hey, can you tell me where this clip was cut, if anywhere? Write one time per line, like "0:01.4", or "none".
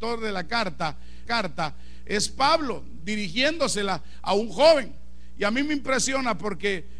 0:01.3